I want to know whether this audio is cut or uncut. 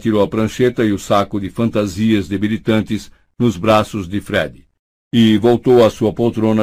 uncut